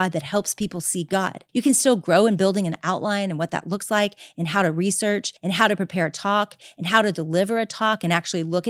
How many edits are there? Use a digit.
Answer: 2